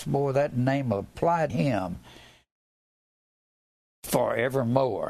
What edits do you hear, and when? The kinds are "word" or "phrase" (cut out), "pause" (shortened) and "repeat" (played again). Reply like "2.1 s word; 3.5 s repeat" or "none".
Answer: 1.5 s word